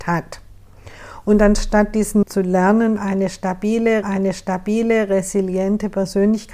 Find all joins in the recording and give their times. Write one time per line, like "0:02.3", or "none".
0:02.2
0:04.0